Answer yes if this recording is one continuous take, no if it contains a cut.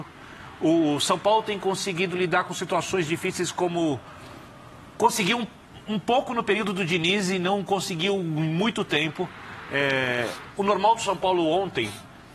yes